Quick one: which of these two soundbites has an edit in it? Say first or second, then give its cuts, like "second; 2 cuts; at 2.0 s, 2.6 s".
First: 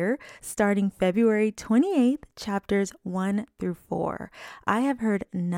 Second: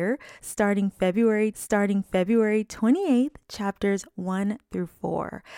second; 1 cut; at 1.5 s